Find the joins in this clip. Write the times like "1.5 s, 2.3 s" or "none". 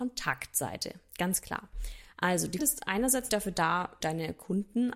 2.6 s, 3.3 s, 4.0 s